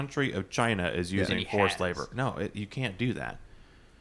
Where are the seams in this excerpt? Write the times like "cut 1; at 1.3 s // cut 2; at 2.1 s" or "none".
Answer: none